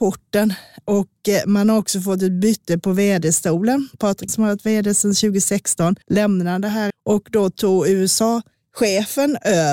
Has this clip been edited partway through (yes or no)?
yes